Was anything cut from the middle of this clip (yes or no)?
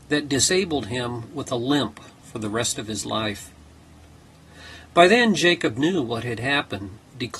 no